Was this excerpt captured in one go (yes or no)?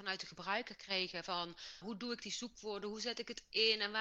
no